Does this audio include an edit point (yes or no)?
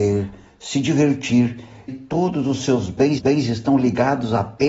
yes